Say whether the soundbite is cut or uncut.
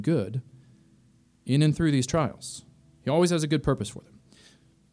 uncut